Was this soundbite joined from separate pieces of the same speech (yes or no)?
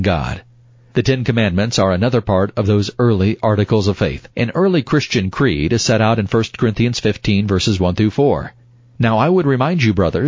yes